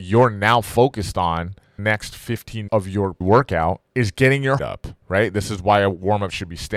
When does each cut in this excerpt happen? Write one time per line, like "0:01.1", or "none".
0:01.8
0:02.7
0:03.2
0:03.9
0:04.6
0:05.0